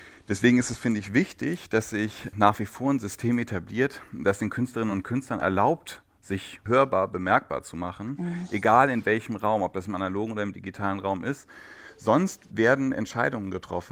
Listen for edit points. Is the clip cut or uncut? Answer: uncut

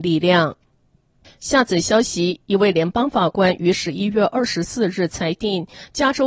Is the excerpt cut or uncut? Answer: cut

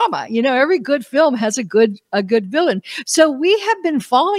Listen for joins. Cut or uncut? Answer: uncut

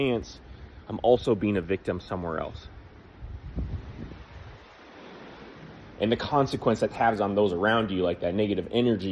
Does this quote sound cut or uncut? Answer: uncut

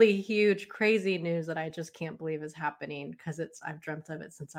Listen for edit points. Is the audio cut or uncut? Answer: uncut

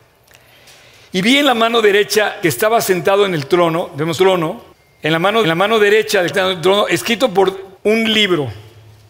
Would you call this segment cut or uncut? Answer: cut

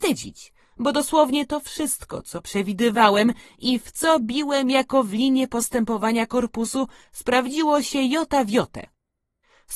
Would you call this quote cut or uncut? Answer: uncut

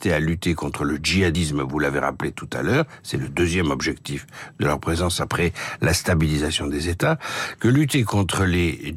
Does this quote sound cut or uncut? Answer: uncut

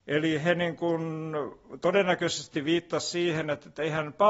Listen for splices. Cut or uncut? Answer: uncut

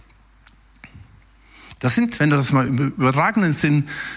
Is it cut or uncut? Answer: uncut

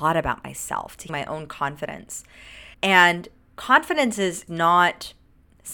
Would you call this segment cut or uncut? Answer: cut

